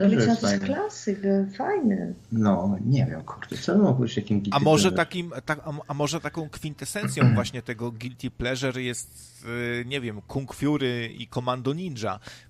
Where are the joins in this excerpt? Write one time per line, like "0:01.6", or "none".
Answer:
none

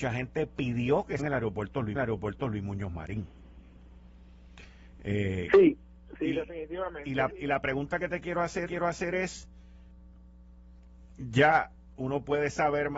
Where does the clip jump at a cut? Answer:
0:01.2
0:01.9
0:06.2
0:07.3
0:08.7

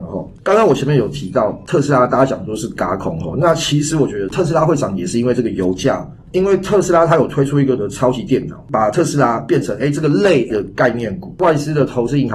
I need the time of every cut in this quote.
0:07.8
0:10.5

